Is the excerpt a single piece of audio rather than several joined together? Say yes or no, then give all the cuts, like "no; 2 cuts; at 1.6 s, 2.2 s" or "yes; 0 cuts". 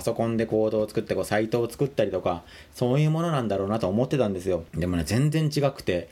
no; 1 cut; at 4.7 s